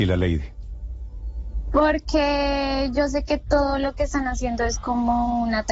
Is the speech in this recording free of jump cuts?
yes; 0 cuts

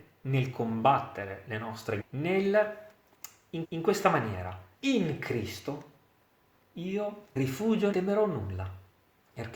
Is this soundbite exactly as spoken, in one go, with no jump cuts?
no; 5 cuts; at 2.0 s, 3.6 s, 4.7 s, 7.4 s, 7.9 s

